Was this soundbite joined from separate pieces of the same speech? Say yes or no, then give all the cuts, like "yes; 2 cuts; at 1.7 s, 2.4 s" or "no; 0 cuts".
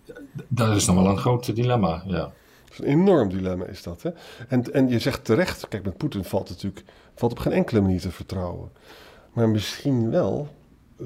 no; 0 cuts